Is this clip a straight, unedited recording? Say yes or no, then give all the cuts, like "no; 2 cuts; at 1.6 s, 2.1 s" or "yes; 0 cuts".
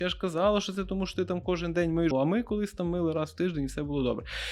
no; 1 cut; at 2.1 s